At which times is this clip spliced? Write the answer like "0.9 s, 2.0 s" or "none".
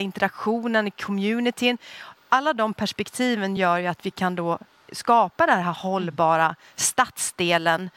none

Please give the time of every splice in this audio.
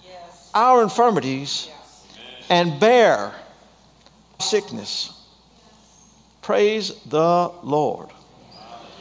4.4 s

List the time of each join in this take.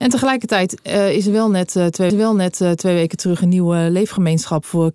2.1 s

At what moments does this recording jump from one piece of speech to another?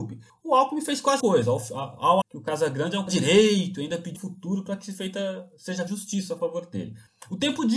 1.2 s, 2.2 s, 3.1 s, 4.2 s, 5.9 s

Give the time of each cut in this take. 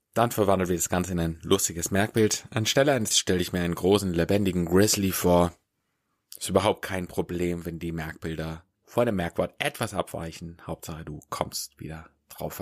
3.1 s, 8.8 s

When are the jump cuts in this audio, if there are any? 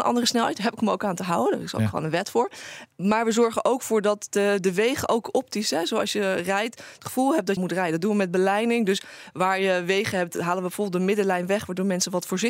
7.6 s

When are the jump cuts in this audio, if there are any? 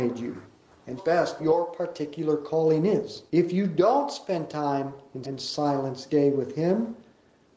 1.0 s, 1.4 s, 3.3 s, 5.2 s, 6.1 s

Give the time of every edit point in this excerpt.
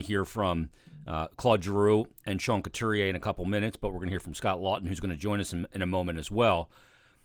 none

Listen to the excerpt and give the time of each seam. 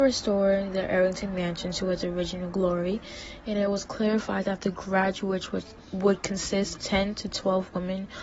6.8 s

